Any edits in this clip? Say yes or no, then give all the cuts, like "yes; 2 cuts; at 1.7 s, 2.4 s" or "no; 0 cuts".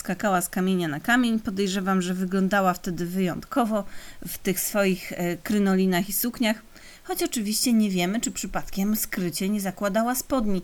no; 0 cuts